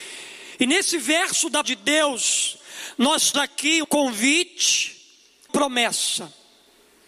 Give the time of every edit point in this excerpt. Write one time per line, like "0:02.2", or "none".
0:01.6
0:03.3
0:03.8
0:05.5

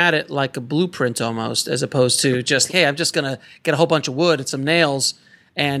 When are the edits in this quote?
0:02.7

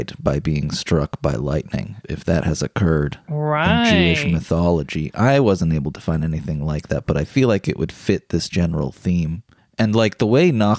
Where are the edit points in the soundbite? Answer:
0:03.2

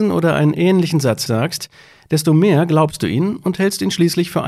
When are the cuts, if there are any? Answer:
0:01.3

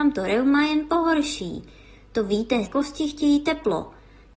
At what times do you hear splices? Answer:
0:02.7

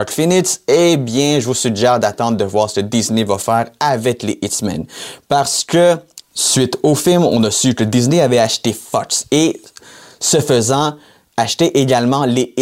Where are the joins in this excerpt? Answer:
none

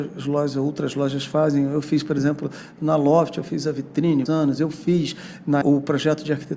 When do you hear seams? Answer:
0:04.3
0:05.6

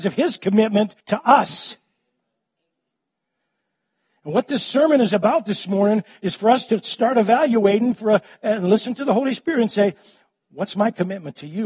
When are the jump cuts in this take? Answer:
0:01.0

